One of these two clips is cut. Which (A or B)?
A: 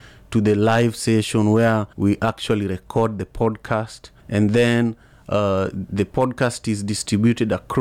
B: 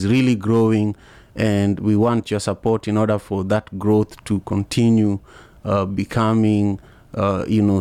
A